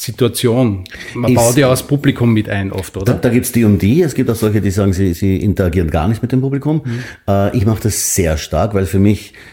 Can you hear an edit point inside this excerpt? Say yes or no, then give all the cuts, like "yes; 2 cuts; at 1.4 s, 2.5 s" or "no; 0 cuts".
yes; 1 cut; at 5.1 s